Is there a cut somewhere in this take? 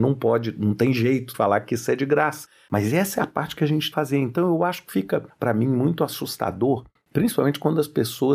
yes; 2 cuts; at 1.3 s, 3.9 s

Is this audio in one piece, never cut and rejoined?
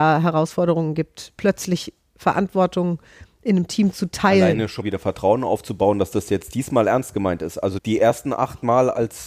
no; 2 cuts; at 4.8 s, 7.8 s

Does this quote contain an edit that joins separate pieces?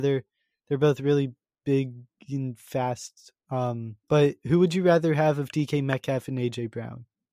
yes; 1 cut; at 4.0 s

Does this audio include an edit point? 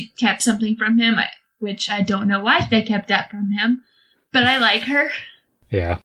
no; 0 cuts

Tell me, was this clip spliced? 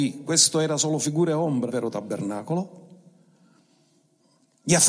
yes; 1 cut; at 1.7 s

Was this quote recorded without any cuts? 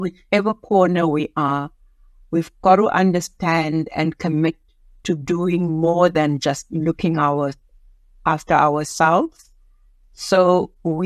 yes; 0 cuts

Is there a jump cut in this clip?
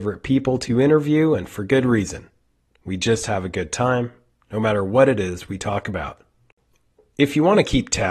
no; 0 cuts

